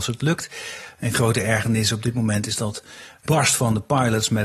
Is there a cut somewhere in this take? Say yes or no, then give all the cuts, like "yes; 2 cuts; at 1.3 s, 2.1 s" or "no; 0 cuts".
yes; 2 cuts; at 1.1 s, 3.3 s